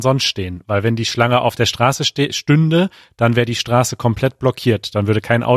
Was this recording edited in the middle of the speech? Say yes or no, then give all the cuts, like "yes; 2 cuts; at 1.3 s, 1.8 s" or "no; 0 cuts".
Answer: no; 0 cuts